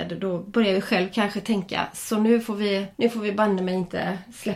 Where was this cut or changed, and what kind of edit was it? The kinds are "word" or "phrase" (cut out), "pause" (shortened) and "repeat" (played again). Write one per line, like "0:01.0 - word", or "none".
0:02.9 - pause